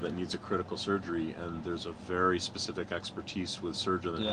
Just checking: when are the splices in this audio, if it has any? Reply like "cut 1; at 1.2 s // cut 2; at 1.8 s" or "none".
none